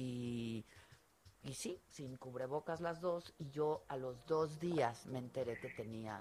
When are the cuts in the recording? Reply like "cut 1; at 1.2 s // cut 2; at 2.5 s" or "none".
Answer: cut 1; at 1.3 s